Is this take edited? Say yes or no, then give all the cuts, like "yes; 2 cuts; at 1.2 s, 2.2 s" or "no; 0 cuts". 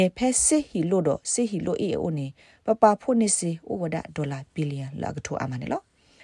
no; 0 cuts